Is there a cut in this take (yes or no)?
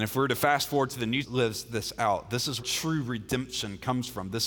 yes